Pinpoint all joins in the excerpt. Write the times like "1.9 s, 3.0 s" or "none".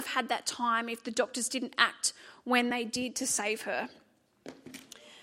none